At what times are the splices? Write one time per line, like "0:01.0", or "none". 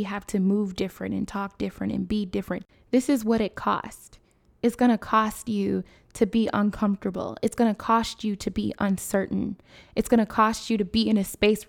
none